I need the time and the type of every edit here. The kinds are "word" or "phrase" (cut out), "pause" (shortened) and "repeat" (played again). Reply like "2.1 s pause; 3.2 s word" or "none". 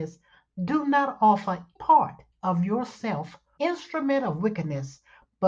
1.8 s word; 2.3 s pause; 3.6 s phrase